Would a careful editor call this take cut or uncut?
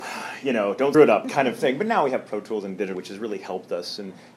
cut